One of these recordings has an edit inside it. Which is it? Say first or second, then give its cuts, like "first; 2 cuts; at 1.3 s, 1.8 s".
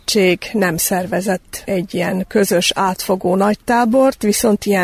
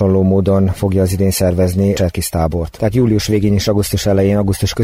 second; 1 cut; at 2.0 s